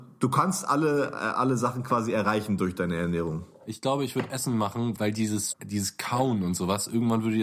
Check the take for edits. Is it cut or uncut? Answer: cut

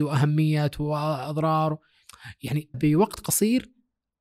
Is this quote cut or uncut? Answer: cut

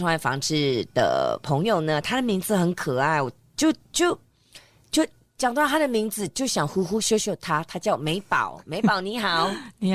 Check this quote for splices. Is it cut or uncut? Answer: uncut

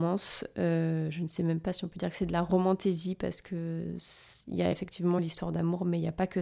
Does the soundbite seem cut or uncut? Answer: uncut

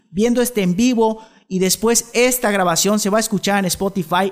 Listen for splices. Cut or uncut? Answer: uncut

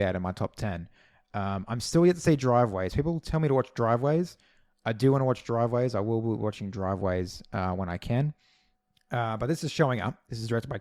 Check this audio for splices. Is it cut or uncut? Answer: uncut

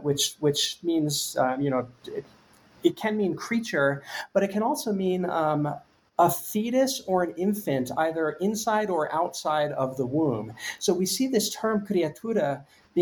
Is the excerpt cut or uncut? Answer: cut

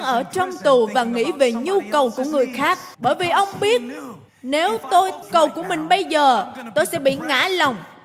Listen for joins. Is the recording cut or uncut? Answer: cut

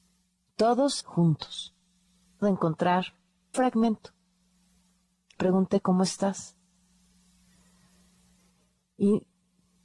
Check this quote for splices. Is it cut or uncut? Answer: cut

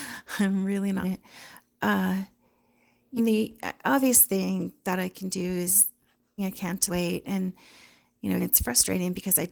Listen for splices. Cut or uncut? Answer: cut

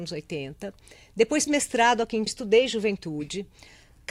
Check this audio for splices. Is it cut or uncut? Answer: cut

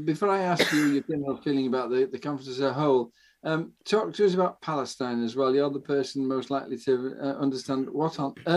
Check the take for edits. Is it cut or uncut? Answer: uncut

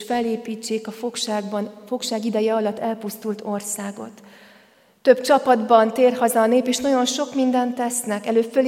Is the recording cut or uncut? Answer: uncut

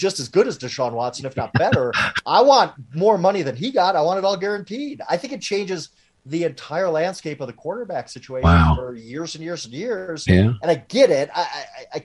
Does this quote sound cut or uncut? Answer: uncut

